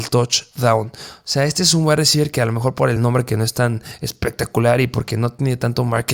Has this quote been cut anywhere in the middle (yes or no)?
no